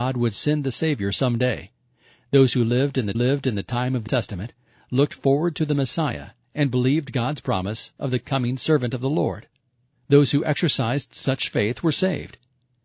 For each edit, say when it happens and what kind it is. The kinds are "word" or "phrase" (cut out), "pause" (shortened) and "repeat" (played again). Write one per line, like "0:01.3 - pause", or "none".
0:03.1 - repeat
0:04.1 - word